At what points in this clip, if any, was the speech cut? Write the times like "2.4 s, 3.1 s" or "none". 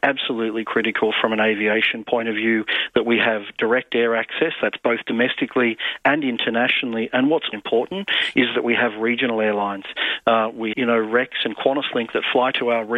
7.5 s, 10.7 s

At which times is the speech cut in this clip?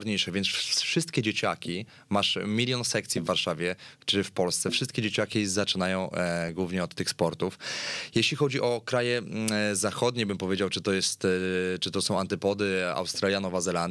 none

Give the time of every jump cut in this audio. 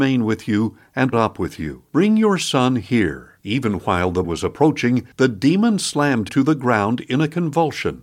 1.1 s, 1.9 s, 3.4 s, 4.2 s, 5.1 s, 6.3 s

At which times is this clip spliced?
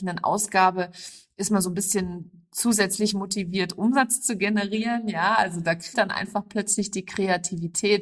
5.9 s

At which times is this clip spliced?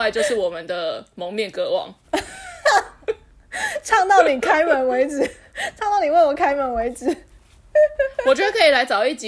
none

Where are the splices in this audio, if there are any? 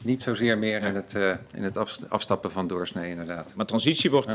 none

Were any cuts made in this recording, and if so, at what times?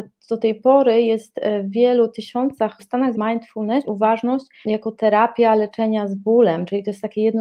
2.8 s, 3.1 s, 3.8 s, 4.6 s

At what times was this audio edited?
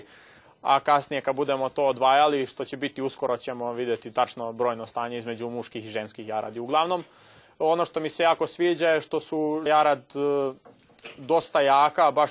9.7 s

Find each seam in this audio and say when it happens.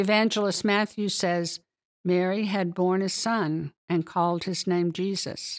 3.8 s

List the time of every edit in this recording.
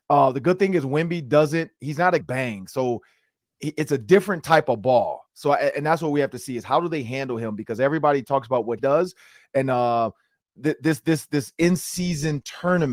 2.2 s, 8.8 s

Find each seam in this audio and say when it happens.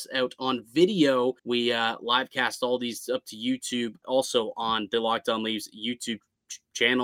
1.4 s, 4.0 s

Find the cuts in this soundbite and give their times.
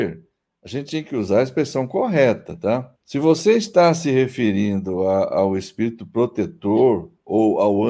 2.9 s

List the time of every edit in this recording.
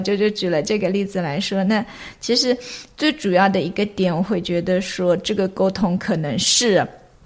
none

